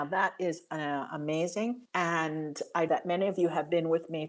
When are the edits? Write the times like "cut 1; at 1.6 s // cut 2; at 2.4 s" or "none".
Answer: cut 1; at 1.8 s // cut 2; at 2.9 s